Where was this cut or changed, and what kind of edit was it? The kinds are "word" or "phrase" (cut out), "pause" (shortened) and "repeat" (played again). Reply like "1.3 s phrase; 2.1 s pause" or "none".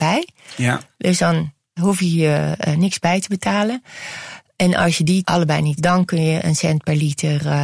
5.8 s word